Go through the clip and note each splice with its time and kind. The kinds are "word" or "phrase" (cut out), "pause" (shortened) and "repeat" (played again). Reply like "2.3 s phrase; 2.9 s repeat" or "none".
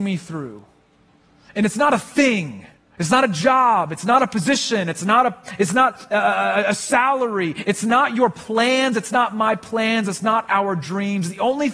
2.8 s pause